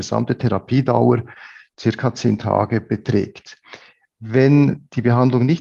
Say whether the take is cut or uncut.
uncut